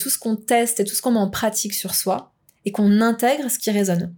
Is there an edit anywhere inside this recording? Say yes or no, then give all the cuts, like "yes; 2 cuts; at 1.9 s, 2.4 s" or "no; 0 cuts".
no; 0 cuts